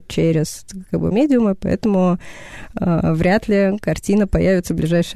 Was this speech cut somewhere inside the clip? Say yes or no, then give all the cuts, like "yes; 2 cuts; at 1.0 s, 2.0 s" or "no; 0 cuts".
yes; 1 cut; at 1.1 s